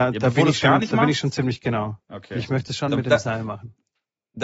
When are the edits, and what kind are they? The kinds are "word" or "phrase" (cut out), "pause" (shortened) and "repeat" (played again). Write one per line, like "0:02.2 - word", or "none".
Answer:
0:02.0 - pause